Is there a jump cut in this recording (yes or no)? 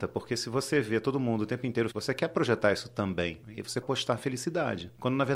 yes